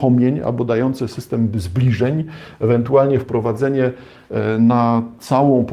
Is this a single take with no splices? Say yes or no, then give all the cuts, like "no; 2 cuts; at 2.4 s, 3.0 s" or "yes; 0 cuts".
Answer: yes; 0 cuts